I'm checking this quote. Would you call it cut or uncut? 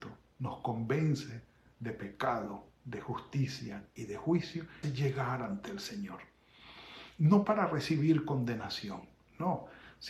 cut